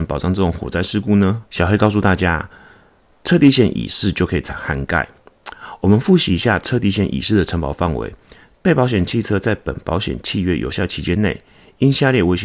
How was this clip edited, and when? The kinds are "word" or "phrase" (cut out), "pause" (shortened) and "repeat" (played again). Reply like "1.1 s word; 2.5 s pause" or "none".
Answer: 1.5 s pause